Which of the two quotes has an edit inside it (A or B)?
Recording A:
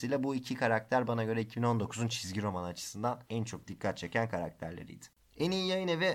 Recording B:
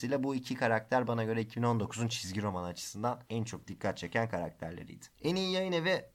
B